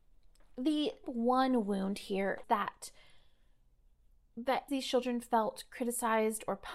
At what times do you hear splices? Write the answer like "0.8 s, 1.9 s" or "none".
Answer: 1.0 s, 2.4 s, 4.7 s